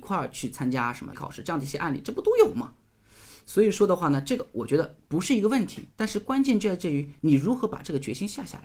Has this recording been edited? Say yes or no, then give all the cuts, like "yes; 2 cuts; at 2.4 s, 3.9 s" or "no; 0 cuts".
yes; 3 cuts; at 1.1 s, 5.0 s, 5.9 s